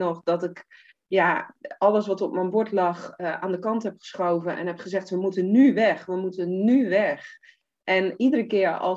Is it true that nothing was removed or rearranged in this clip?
yes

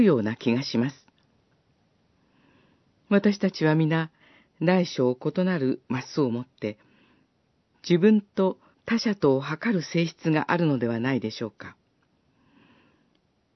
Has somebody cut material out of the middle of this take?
yes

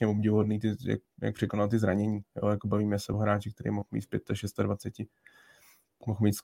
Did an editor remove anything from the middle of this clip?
no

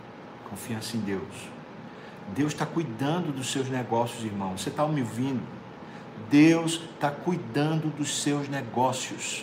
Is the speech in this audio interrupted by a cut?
no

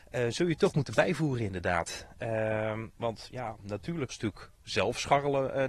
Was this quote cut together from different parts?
yes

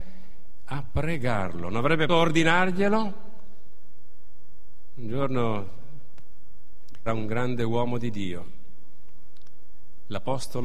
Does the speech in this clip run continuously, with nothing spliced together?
no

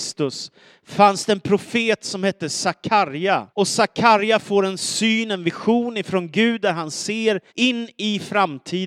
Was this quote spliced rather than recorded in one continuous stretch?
yes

